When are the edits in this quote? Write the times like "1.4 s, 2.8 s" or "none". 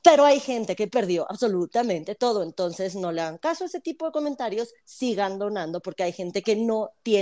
none